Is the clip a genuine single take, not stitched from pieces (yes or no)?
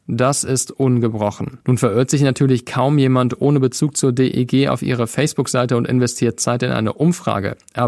no